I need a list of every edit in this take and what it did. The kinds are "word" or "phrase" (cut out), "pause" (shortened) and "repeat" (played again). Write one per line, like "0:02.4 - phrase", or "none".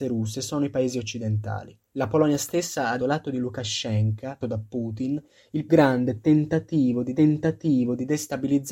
0:01.9 - pause
0:03.0 - word
0:04.4 - word
0:05.7 - word
0:07.1 - repeat